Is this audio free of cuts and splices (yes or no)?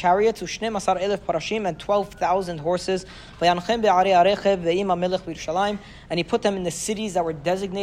yes